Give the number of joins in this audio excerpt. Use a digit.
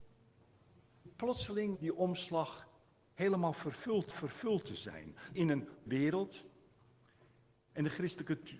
4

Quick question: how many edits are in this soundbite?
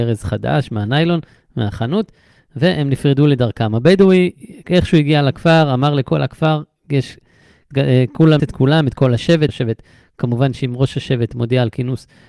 3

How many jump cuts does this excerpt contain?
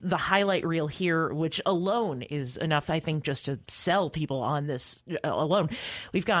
0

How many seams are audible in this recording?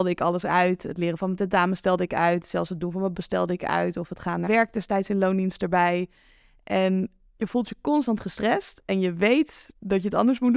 2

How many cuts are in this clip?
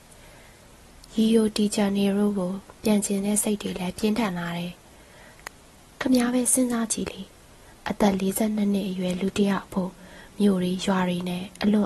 0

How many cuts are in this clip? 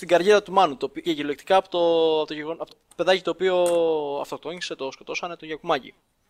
3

